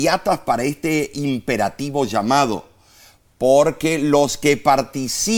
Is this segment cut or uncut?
uncut